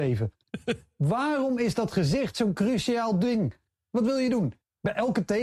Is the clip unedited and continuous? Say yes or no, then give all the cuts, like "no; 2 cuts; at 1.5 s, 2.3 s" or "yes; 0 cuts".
yes; 0 cuts